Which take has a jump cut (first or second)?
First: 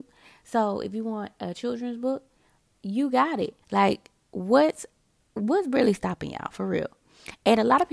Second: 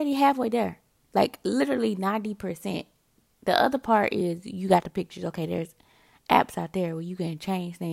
first